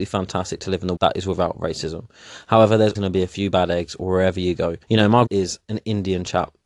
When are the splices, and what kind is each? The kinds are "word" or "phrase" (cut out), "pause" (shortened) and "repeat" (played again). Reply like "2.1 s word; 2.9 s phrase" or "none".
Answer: 1.0 s word; 2.9 s word; 4.8 s pause; 5.3 s word